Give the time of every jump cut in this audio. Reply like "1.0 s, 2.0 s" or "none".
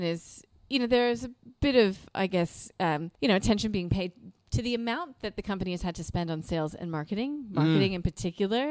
1.4 s, 3.1 s

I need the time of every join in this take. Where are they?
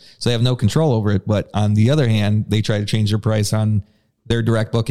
none

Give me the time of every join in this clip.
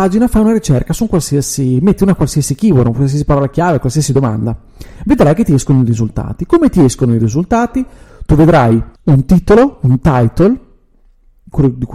9.0 s

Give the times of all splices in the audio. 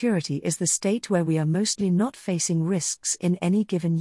none

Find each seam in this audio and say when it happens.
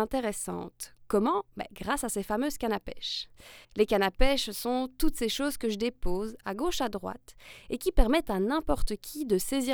3.6 s

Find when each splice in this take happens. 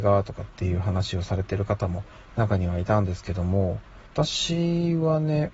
4.1 s

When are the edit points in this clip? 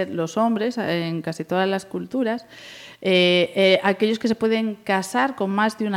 none

